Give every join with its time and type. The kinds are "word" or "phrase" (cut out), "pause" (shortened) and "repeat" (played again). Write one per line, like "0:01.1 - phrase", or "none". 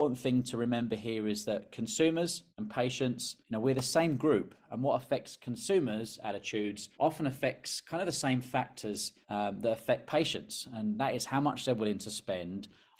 0:02.5 - pause
0:03.4 - pause
0:06.9 - pause
0:09.2 - pause